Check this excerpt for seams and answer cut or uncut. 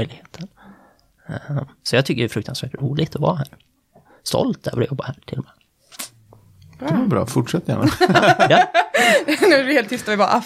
uncut